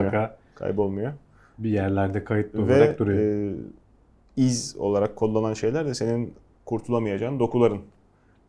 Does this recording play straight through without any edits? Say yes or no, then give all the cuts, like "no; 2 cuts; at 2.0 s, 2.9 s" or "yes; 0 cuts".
yes; 0 cuts